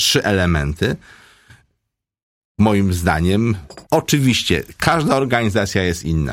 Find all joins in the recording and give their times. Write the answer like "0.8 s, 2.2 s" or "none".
3.9 s